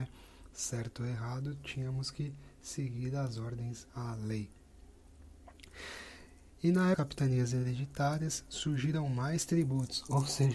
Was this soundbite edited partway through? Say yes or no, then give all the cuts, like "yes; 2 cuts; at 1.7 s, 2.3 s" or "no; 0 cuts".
yes; 1 cut; at 6.9 s